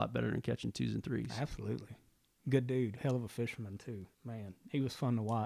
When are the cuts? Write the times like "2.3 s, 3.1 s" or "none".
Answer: 4.1 s